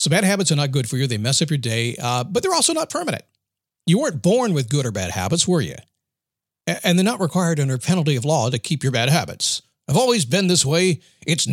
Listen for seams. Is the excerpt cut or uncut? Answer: uncut